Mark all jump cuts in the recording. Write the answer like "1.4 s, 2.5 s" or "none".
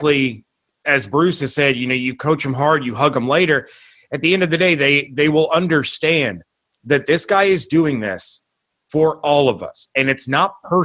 none